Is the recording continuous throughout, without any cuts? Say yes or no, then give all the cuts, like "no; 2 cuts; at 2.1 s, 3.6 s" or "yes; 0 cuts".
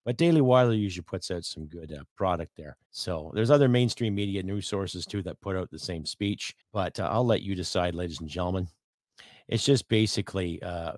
no; 3 cuts; at 2.1 s, 2.9 s, 6.6 s